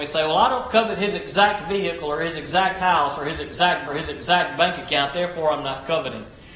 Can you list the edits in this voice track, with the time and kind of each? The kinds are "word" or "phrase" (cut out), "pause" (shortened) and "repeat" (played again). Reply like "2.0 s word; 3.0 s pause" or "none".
3.9 s repeat